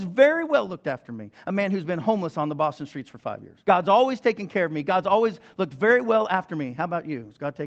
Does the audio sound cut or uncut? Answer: cut